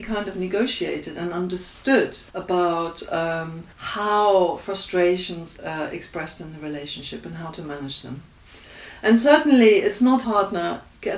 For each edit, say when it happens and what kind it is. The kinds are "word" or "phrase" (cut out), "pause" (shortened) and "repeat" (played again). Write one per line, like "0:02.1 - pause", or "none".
0:02.3 - pause
0:03.7 - pause
0:05.6 - word
0:10.2 - phrase